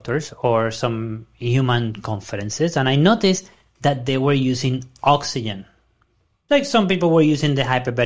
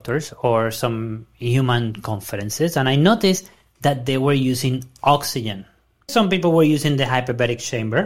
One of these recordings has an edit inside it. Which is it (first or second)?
second